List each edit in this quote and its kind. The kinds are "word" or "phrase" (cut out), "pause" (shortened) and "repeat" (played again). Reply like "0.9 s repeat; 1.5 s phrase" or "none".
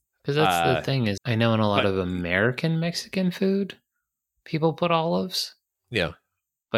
1.2 s word